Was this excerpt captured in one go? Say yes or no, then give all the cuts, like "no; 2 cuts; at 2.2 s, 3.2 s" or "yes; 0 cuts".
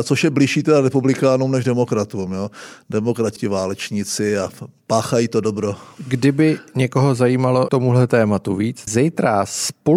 no; 3 cuts; at 3.4 s, 7.7 s, 8.9 s